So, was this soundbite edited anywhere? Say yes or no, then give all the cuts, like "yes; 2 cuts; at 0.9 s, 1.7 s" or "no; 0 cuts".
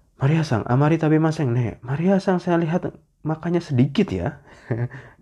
no; 0 cuts